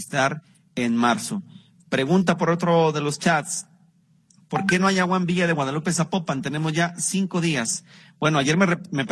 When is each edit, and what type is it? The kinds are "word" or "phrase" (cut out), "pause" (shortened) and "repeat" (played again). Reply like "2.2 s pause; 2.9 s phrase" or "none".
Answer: none